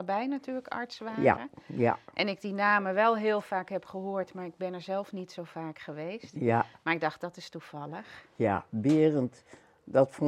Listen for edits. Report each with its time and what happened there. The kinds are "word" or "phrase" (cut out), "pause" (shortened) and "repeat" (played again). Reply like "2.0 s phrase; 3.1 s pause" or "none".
none